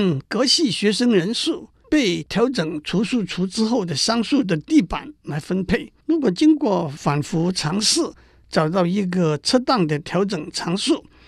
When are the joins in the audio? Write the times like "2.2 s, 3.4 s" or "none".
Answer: 6.0 s